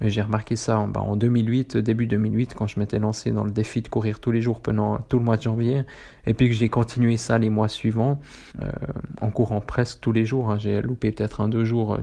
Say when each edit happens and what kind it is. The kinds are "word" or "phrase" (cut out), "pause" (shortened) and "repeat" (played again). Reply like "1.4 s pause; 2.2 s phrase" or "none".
8.5 s pause

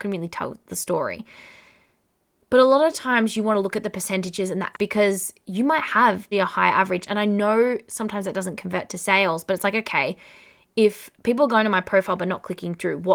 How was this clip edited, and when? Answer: 4.7 s word; 6.3 s word

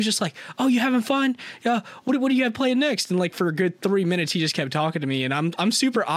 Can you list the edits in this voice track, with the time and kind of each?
none

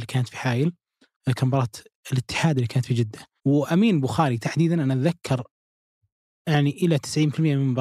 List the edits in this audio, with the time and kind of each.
3.4 s pause

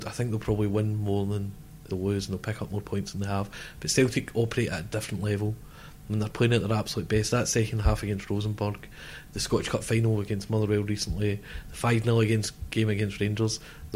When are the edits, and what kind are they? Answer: 1.9 s phrase

